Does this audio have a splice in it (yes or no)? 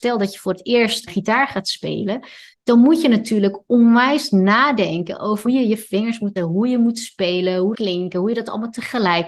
yes